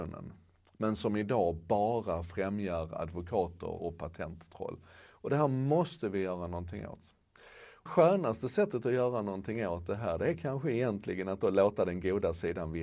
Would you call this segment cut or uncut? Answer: cut